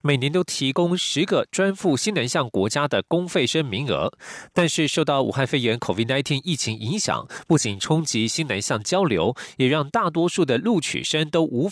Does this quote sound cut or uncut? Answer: uncut